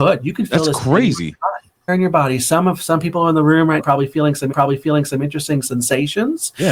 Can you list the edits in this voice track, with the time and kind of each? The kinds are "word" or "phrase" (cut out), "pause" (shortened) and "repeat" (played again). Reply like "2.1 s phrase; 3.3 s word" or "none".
1.9 s word; 3.8 s word; 4.5 s repeat